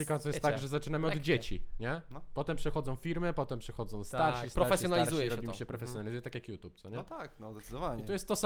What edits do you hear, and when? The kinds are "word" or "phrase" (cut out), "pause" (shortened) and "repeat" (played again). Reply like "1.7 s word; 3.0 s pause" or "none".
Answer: none